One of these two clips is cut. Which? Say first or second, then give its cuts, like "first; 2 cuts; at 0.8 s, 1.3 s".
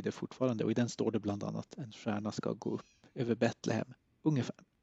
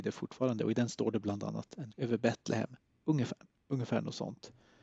second; 1 cut; at 1.9 s